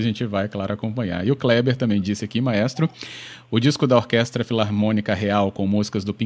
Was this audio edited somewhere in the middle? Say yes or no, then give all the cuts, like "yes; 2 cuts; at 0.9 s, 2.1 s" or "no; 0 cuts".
no; 0 cuts